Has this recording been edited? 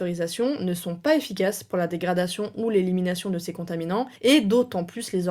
yes; 1 cut; at 4.2 s

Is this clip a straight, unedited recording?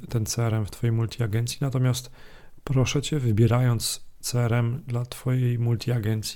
yes; 0 cuts

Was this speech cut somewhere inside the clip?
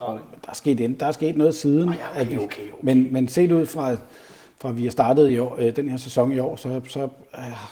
no; 0 cuts

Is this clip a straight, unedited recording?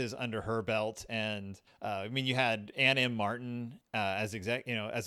yes; 0 cuts

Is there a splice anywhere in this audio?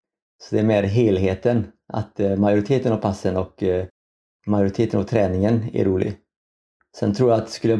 no; 0 cuts

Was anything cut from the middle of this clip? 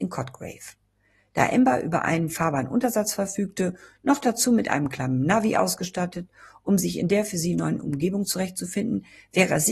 no; 0 cuts

